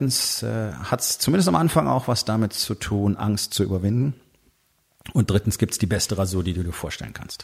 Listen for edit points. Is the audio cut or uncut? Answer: uncut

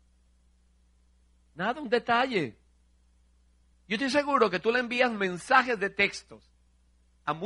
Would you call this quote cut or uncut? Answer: uncut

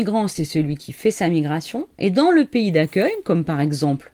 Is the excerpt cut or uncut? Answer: uncut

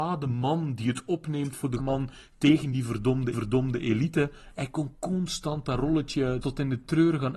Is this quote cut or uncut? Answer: cut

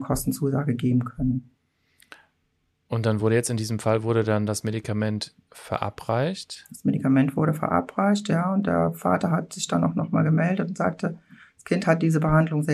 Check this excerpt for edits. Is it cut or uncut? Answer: uncut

